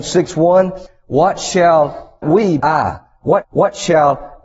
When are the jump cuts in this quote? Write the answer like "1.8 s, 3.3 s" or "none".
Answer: 2.2 s, 2.6 s, 3.4 s